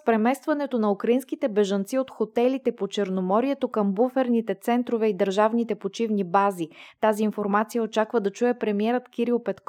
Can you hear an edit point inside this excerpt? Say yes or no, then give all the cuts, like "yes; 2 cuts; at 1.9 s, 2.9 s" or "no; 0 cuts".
no; 0 cuts